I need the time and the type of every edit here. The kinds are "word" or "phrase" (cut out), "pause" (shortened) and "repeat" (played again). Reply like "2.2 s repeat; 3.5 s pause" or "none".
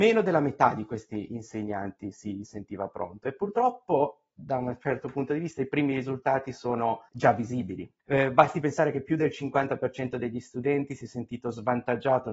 7.1 s pause